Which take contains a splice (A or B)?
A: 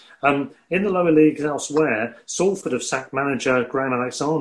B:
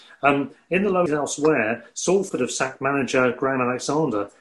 B